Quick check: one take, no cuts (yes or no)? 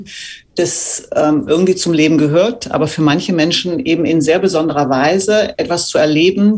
yes